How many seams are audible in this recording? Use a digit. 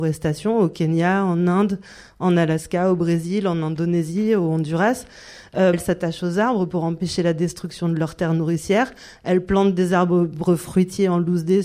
1